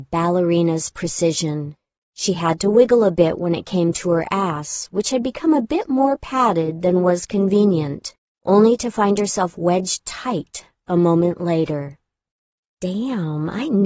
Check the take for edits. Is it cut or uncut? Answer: uncut